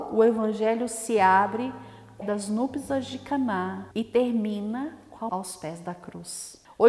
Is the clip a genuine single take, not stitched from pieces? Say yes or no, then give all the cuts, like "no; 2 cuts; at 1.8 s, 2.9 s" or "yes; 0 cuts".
no; 3 cuts; at 2.2 s, 3.9 s, 5.3 s